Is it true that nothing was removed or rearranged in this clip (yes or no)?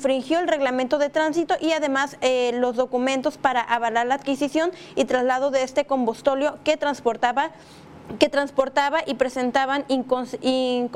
yes